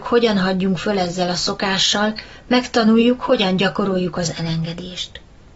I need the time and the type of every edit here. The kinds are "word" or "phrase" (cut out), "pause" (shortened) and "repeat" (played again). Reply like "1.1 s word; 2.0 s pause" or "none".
none